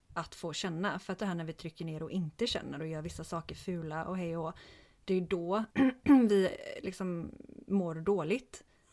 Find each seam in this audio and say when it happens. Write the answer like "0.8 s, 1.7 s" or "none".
1.2 s, 5.7 s